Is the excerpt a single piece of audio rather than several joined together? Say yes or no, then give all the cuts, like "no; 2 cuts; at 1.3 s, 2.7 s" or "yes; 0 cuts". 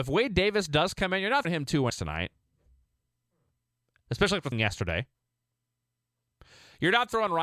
no; 3 cuts; at 1.4 s, 1.9 s, 4.5 s